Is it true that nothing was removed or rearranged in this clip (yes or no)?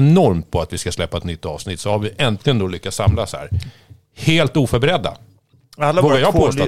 yes